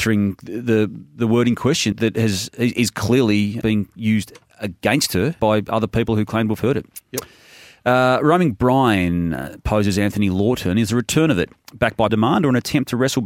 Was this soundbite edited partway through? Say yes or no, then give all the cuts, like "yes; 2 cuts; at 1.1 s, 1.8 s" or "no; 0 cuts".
yes; 4 cuts; at 1.9 s, 3.6 s, 5.4 s, 12.1 s